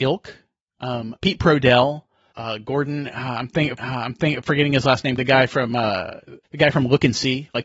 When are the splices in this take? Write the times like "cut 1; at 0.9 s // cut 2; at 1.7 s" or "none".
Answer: cut 1; at 1.2 s // cut 2; at 2.3 s // cut 3; at 3.8 s // cut 4; at 5.2 s // cut 5; at 6.4 s